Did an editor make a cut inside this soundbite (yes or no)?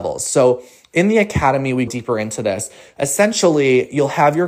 yes